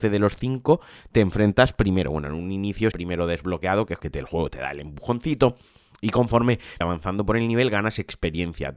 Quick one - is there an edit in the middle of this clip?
yes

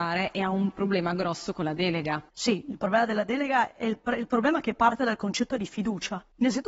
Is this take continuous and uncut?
yes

